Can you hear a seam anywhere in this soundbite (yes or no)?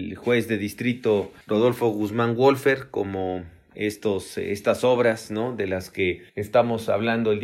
yes